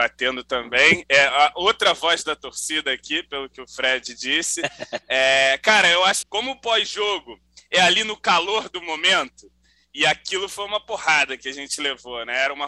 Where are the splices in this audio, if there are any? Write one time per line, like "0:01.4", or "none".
0:06.2